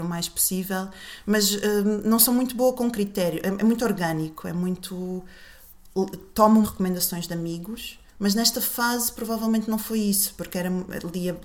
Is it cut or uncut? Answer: cut